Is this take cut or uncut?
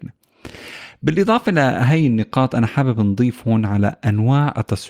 uncut